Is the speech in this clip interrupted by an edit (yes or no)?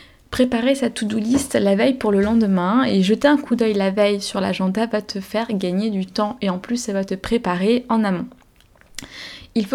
no